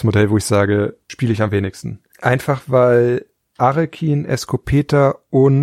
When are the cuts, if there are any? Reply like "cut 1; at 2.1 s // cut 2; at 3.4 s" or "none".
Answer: none